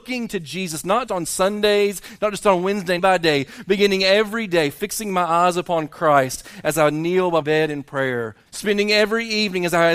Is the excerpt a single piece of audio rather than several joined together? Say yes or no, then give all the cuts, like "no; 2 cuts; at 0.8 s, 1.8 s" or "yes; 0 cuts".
no; 4 cuts; at 1.1 s, 3.0 s, 7.4 s, 8.5 s